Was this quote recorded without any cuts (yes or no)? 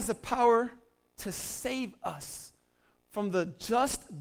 yes